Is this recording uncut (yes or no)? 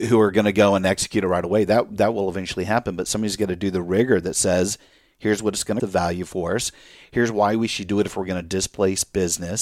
no